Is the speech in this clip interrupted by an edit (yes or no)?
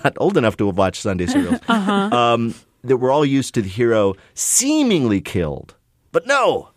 no